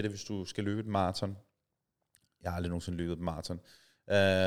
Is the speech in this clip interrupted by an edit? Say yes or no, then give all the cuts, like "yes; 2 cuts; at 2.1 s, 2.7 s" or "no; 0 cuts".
no; 0 cuts